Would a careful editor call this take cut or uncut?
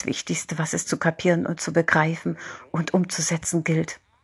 uncut